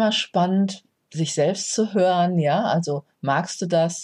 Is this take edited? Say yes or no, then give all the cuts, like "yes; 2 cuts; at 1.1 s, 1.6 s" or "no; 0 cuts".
no; 0 cuts